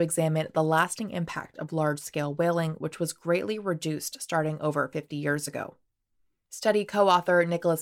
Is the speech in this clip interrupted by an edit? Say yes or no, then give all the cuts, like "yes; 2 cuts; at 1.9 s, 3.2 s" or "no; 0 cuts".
no; 0 cuts